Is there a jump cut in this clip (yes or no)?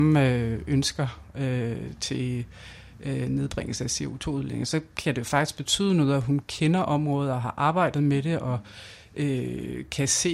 no